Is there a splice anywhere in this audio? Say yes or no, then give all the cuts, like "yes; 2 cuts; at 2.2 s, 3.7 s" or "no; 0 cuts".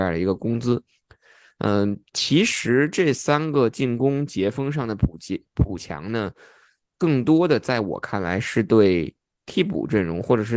no; 0 cuts